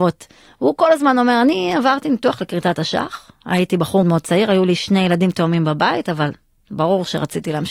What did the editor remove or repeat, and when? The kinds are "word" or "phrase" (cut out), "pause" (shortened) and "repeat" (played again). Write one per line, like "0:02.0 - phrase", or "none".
0:04.0 - word